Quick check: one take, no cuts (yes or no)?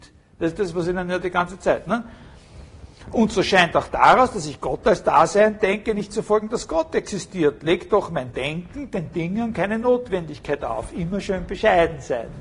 yes